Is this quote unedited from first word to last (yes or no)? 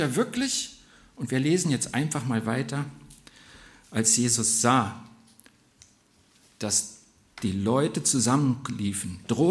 yes